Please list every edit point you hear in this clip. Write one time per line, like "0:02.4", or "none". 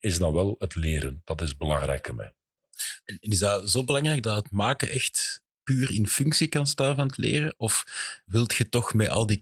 0:02.1
0:03.0
0:04.2
0:05.5
0:08.2